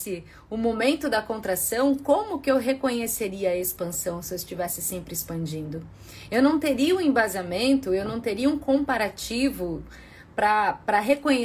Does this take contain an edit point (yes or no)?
no